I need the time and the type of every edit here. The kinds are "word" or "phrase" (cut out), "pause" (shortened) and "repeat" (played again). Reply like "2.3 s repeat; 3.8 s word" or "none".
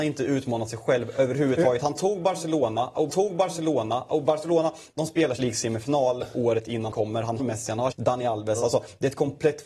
3.1 s repeat; 5.4 s word; 6.9 s word; 7.4 s word; 7.9 s phrase